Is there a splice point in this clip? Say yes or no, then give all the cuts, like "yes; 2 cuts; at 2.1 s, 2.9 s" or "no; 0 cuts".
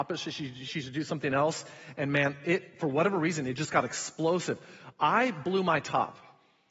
no; 0 cuts